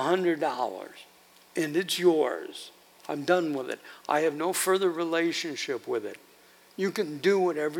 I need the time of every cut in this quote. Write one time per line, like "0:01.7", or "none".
0:01.3